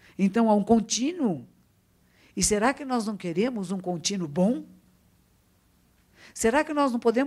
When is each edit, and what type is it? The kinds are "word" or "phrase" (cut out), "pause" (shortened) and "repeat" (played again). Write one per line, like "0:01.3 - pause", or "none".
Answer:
none